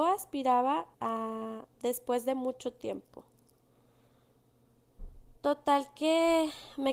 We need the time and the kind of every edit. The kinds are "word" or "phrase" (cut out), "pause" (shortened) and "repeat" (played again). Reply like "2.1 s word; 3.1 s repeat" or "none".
0.9 s pause; 5.4 s pause